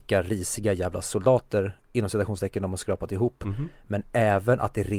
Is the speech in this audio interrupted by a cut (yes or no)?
no